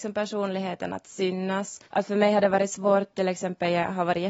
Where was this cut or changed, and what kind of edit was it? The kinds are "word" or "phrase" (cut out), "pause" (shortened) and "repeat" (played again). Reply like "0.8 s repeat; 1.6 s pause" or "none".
1.9 s pause

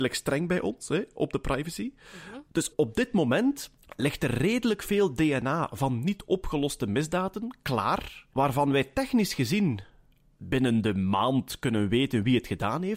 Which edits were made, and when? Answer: 2.5 s pause; 8.3 s pause

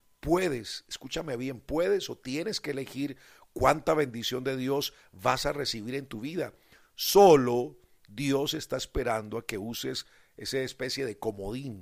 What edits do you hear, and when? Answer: none

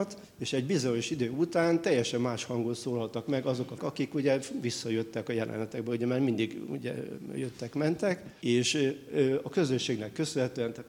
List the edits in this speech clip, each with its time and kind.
3.8 s word

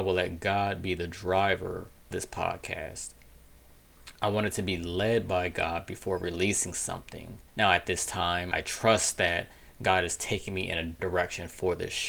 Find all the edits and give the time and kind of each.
2.1 s word; 7.5 s pause; 8.5 s word; 11.0 s word

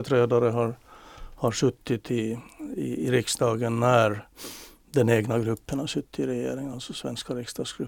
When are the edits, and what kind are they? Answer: none

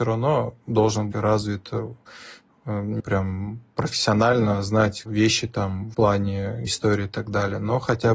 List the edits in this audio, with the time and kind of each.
1.1 s word; 3.0 s word; 5.0 s word; 5.9 s word; 6.7 s word

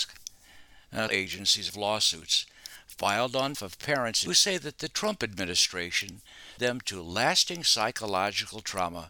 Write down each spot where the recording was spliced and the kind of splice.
1.1 s phrase; 1.7 s phrase; 3.5 s word; 4.3 s phrase; 6.6 s word

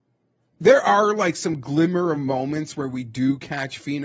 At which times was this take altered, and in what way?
none

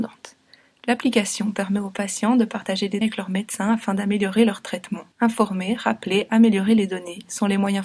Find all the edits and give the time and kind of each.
3.0 s word; 5.1 s pause

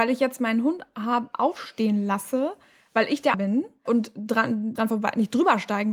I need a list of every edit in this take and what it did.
3.3 s word; 3.9 s word; 4.8 s word

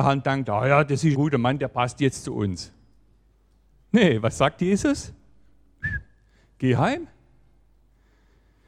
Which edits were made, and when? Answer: 1.1 s word

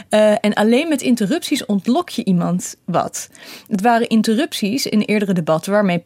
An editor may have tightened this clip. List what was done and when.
none

